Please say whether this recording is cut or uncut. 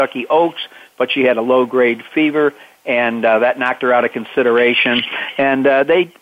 uncut